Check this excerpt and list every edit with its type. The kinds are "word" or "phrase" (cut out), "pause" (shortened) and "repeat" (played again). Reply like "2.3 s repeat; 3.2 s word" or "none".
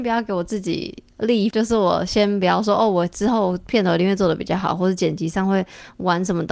1.5 s word